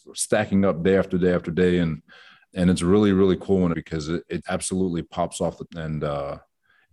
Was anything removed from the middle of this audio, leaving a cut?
yes; 4 cuts; at 2.5 s, 3.7 s, 4.4 s, 5.7 s

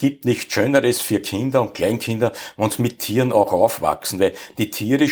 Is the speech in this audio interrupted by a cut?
no; 0 cuts

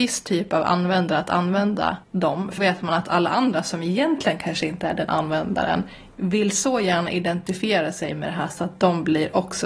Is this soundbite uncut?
no; 2 cuts; at 2.0 s, 2.6 s

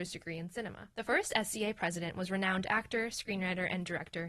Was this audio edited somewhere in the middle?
no; 0 cuts

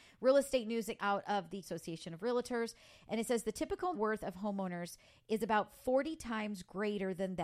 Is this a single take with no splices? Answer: no; 3 cuts; at 1.0 s, 1.6 s, 3.9 s

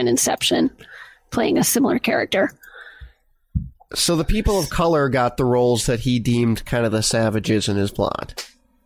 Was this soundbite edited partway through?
no; 0 cuts

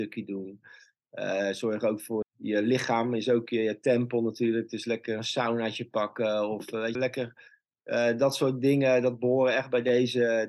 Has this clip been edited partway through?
yes; 2 cuts; at 2.2 s, 6.9 s

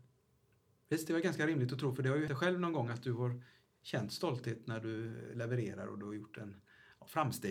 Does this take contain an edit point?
yes; 1 cut; at 2.3 s

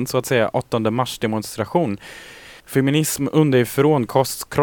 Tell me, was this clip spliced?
yes; 1 cut; at 2.6 s

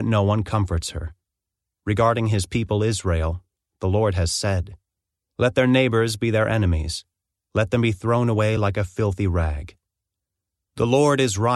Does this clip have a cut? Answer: no; 0 cuts

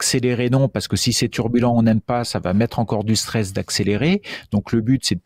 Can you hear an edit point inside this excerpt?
no; 0 cuts

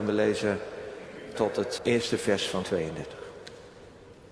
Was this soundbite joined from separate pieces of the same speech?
yes; 3 cuts; at 1.3 s, 1.8 s, 2.6 s

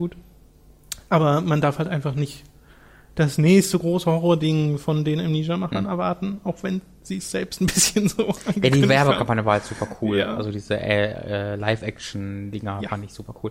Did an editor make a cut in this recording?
no; 0 cuts

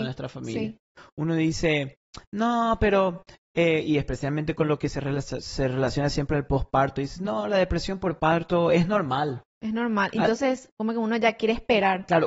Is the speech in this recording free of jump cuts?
yes; 0 cuts

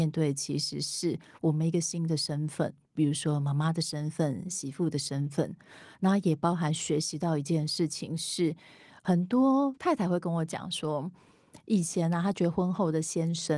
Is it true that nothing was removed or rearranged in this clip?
yes; 0 cuts

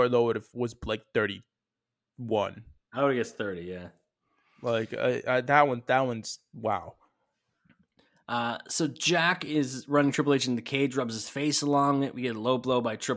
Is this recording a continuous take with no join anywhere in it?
yes; 0 cuts

